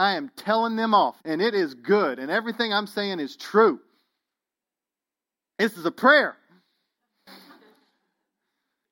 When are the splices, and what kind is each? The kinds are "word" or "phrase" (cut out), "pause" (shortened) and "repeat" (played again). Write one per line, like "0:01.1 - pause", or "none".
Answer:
0:01.2 - pause